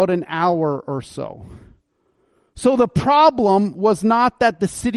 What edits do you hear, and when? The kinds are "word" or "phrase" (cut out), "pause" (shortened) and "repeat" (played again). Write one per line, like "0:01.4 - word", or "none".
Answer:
none